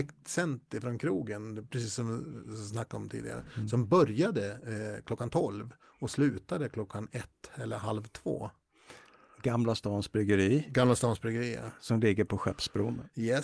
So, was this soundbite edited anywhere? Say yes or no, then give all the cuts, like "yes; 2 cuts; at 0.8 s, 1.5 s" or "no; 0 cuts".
no; 0 cuts